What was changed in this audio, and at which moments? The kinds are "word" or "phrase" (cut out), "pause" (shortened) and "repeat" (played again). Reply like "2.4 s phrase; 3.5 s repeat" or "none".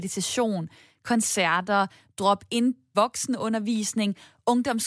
2.9 s phrase